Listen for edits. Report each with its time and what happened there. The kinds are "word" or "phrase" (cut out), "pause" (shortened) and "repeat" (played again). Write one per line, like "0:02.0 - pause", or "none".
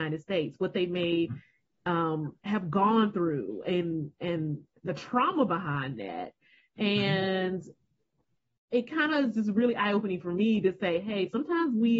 none